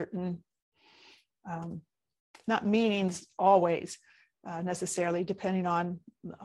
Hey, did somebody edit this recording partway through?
no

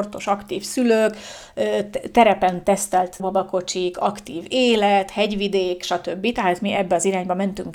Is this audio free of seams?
no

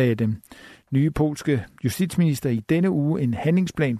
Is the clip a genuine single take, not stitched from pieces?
no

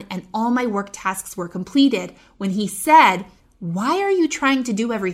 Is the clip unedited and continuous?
yes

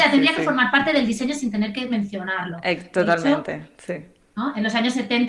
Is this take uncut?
yes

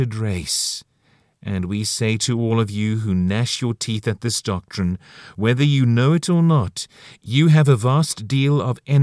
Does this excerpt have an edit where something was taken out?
no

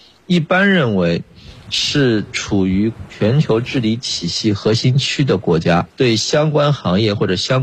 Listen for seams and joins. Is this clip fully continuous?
no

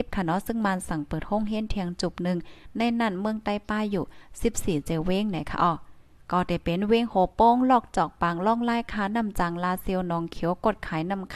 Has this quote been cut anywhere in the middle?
yes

